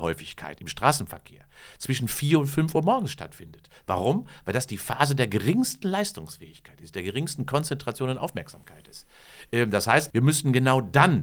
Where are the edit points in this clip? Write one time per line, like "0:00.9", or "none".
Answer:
0:10.1